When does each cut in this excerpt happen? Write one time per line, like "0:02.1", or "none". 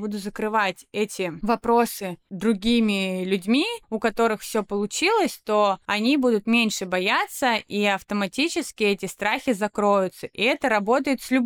0:03.8

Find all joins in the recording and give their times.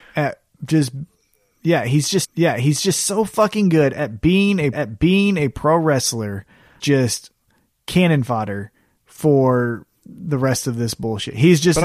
0:02.2
0:04.7
0:06.8

